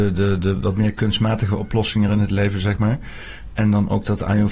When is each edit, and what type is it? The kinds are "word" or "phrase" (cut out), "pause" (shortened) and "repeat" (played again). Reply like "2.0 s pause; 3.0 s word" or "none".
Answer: none

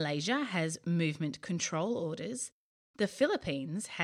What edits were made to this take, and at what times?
none

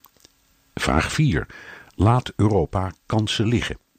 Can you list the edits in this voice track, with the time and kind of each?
none

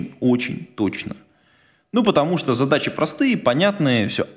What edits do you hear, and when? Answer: none

